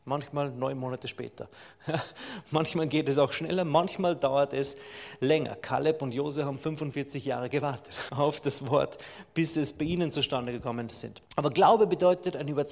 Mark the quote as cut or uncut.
cut